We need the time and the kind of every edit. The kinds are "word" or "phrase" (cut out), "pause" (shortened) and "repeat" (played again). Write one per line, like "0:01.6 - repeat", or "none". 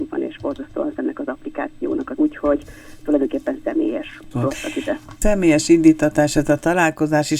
0:01.0 - word
0:02.2 - word
0:04.3 - word